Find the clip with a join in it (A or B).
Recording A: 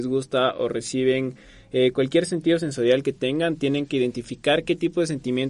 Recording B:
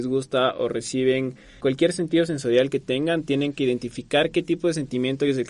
B